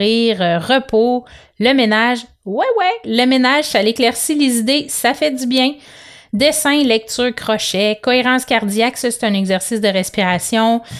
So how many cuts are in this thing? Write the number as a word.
zero